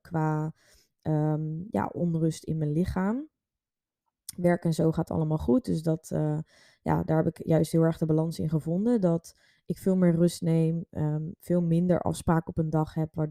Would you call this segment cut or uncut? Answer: uncut